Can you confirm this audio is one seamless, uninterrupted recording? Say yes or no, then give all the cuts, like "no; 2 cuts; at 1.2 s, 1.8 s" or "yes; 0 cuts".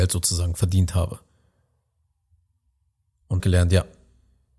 no; 1 cut; at 3.4 s